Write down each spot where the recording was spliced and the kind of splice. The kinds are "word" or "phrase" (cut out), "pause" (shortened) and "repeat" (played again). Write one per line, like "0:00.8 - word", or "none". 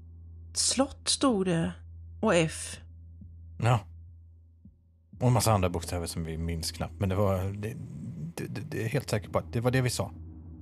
none

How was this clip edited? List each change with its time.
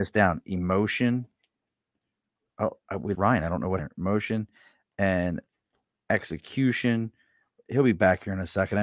0:03.1 - word
0:03.8 - word

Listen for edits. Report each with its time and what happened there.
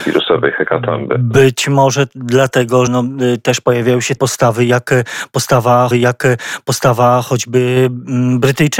0:02.9 - word
0:04.2 - word
0:05.9 - repeat

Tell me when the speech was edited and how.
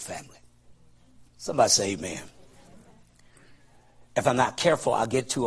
0:01.3 - pause

